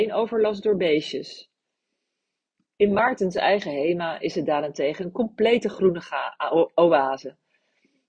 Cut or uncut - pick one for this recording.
uncut